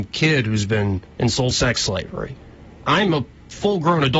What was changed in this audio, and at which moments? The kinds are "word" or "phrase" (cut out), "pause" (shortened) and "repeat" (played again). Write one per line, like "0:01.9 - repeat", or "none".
0:01.1 - word
0:01.5 - word